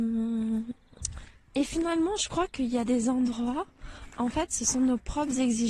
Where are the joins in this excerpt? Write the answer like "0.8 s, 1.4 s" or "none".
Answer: none